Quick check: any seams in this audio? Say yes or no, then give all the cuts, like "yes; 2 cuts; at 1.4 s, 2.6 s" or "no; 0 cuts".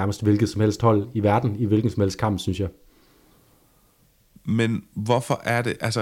no; 0 cuts